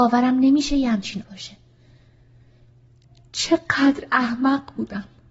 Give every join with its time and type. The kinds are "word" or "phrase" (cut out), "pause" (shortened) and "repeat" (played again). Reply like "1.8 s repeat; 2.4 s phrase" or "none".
1.2 s word